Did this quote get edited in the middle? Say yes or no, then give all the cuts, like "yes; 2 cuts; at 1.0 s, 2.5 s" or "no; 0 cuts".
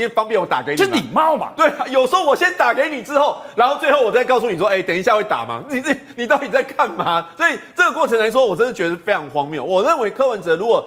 no; 0 cuts